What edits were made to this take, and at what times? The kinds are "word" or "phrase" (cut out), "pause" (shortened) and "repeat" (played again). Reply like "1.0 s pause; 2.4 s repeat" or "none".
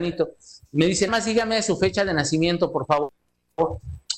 1.1 s word